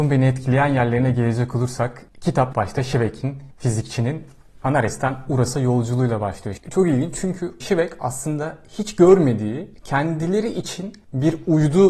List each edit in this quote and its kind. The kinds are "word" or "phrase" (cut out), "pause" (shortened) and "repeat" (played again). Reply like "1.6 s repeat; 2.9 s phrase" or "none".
2.5 s word; 7.6 s word